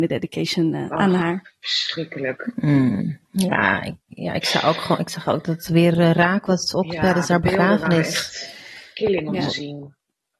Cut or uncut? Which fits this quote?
cut